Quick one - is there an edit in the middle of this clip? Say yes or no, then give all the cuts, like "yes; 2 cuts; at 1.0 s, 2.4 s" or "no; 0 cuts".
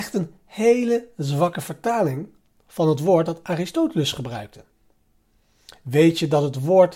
no; 0 cuts